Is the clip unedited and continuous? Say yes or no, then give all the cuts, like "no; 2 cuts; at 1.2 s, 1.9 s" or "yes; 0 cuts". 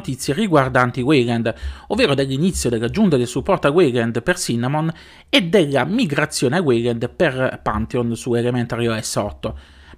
yes; 0 cuts